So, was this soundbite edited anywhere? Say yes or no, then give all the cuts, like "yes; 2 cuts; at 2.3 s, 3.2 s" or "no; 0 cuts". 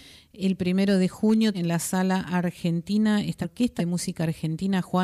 yes; 3 cuts; at 1.5 s, 3.4 s, 3.8 s